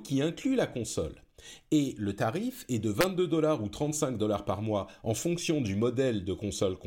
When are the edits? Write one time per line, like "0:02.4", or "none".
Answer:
none